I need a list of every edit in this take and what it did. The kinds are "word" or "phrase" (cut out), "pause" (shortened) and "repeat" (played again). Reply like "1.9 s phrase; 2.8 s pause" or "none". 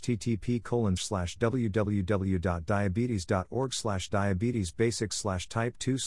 1.0 s word